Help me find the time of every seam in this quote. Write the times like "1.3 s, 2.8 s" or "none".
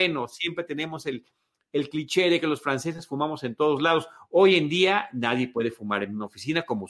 none